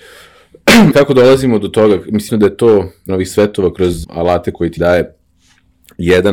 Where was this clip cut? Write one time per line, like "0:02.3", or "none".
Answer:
0:00.9
0:02.3
0:03.1
0:04.0
0:04.8